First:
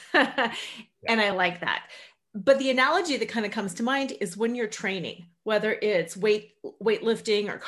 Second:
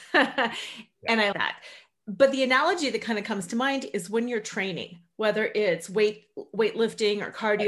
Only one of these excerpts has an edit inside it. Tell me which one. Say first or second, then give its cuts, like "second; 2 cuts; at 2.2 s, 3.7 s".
second; 1 cut; at 1.3 s